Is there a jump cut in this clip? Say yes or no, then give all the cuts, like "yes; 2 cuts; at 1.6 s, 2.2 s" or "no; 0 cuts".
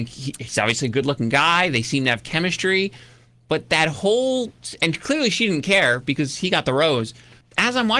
no; 0 cuts